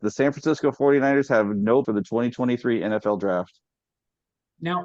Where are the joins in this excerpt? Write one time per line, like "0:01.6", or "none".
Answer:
0:01.8